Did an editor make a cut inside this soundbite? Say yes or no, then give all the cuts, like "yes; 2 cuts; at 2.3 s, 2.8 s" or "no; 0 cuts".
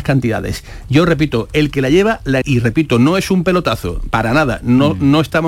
yes; 1 cut; at 2.4 s